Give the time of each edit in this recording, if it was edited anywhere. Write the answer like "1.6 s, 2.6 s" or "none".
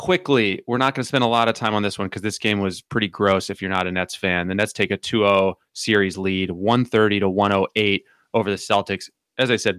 none